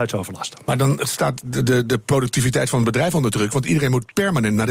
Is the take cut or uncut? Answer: uncut